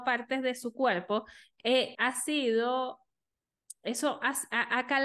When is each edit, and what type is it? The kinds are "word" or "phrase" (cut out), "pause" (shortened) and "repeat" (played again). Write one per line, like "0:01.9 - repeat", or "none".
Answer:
0:01.9 - word